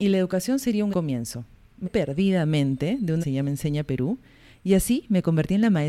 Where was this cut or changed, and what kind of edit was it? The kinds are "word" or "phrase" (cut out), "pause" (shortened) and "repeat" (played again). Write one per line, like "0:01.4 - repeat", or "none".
0:00.9 - word
0:01.8 - word
0:03.2 - phrase